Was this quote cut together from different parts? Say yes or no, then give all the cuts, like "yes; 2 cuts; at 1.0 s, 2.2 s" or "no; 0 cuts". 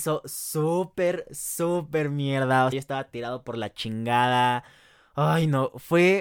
yes; 1 cut; at 2.7 s